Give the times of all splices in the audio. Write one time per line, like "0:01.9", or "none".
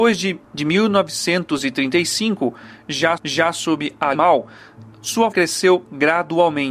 0:03.2
0:04.1
0:05.3